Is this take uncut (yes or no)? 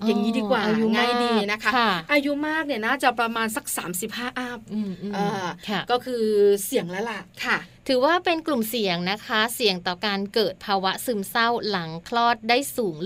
no